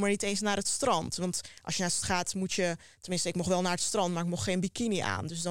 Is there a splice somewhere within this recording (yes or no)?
yes